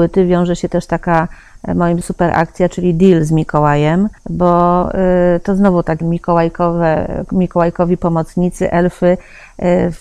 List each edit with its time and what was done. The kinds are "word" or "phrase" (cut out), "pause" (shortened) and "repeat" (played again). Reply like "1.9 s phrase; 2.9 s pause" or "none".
2.0 s word; 4.2 s pause; 6.0 s phrase